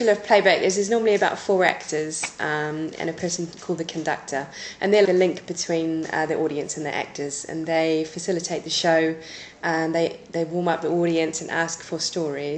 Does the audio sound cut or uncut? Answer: cut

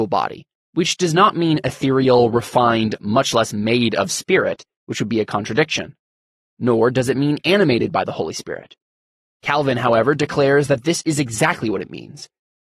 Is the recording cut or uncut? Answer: uncut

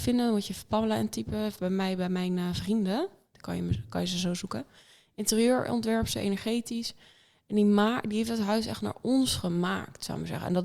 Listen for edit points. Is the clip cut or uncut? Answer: uncut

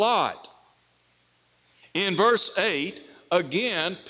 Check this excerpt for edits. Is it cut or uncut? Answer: uncut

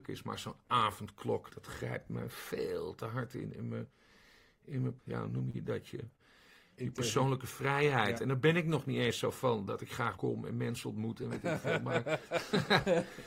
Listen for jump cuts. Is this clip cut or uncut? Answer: cut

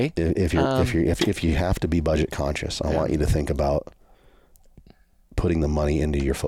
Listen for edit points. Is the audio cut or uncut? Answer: uncut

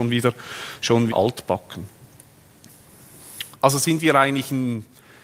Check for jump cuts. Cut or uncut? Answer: cut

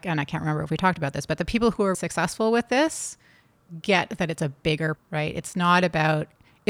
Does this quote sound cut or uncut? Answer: cut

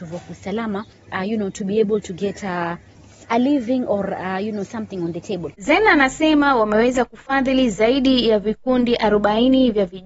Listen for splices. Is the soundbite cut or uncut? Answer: uncut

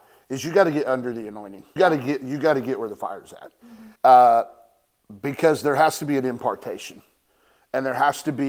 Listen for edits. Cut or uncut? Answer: cut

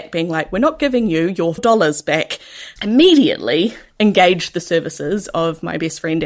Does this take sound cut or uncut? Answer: cut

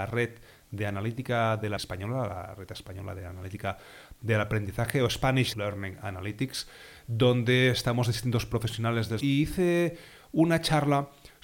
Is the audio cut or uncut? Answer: cut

